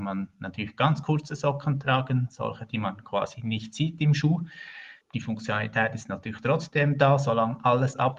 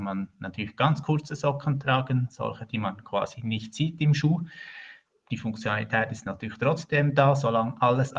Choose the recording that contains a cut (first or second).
first